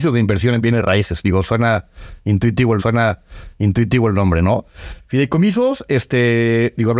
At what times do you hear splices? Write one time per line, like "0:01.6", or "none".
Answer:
0:02.8

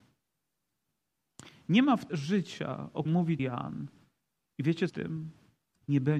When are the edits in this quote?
0:02.1
0:03.1
0:03.4
0:04.9

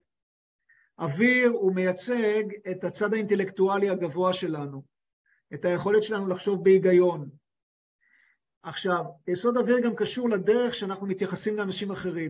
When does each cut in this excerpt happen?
none

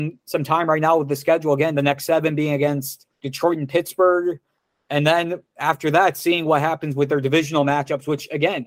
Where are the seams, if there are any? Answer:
0:03.1

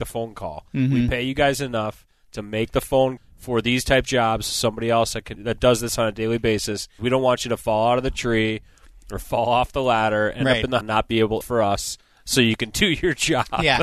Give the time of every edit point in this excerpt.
0:03.2
0:04.0
0:05.3
0:07.0
0:10.8
0:11.4

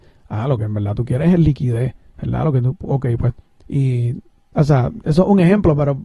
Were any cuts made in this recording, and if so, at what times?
0:03.4

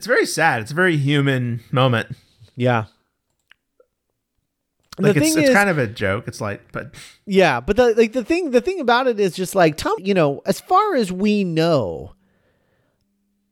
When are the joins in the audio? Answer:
0:10.0

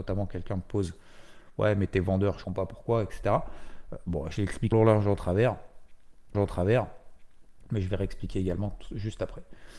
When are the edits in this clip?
0:02.4
0:04.7
0:06.3

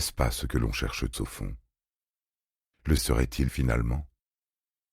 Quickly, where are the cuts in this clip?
0:01.1
0:03.0
0:03.5

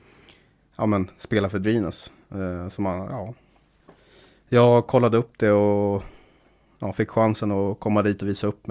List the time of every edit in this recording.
none

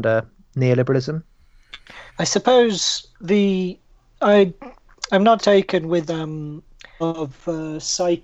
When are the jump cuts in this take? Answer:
0:02.1
0:03.1
0:05.4
0:06.1
0:07.0

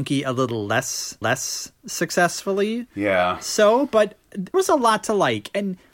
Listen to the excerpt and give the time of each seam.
0:01.2
0:04.5

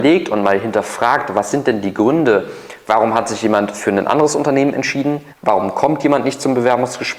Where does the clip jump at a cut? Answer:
0:05.3

